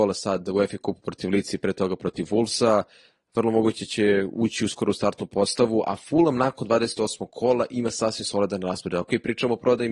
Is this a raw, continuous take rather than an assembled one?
yes; 0 cuts

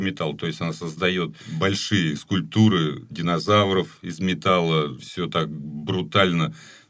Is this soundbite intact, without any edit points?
yes; 0 cuts

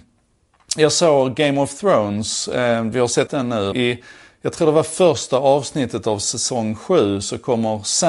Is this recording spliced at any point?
yes; 2 cuts; at 3.3 s, 3.7 s

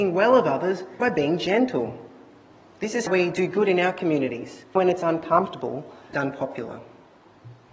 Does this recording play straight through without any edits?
no; 4 cuts; at 1.0 s, 3.1 s, 4.8 s, 6.1 s

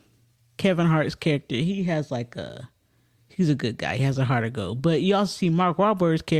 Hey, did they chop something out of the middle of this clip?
no; 0 cuts

